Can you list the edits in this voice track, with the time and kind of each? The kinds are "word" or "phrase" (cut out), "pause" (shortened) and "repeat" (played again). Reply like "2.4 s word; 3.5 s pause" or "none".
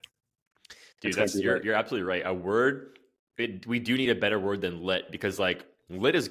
none